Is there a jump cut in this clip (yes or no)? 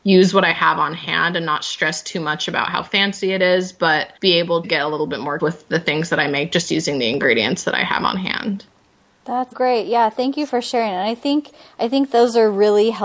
yes